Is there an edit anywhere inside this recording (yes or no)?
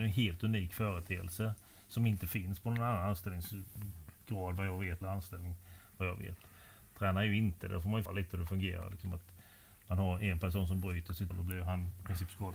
yes